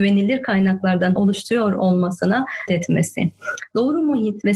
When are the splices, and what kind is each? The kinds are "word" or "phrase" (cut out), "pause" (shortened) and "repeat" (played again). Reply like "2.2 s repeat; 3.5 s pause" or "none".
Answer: 1.2 s word; 2.7 s word